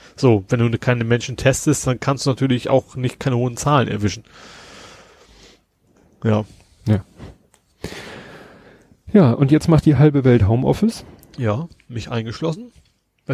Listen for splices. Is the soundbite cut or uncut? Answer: uncut